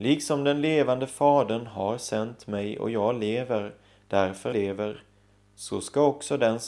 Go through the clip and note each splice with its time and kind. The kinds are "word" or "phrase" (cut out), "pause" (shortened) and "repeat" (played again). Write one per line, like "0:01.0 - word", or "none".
0:04.5 - phrase